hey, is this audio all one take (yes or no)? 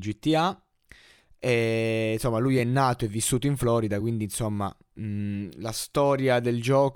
yes